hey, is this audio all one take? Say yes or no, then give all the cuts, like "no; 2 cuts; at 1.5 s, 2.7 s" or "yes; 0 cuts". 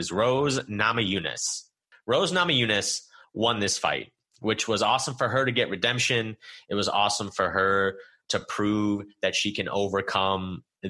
yes; 0 cuts